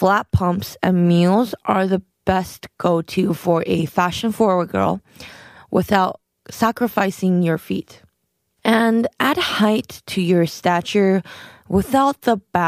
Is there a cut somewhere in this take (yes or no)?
no